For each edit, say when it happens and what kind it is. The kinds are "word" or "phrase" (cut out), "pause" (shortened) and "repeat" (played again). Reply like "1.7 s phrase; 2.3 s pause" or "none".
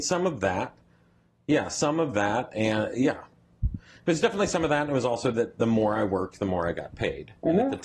none